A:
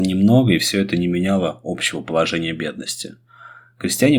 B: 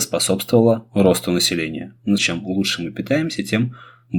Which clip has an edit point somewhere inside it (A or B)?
B